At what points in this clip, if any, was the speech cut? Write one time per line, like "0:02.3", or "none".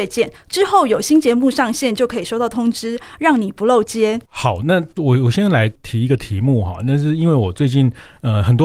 0:04.3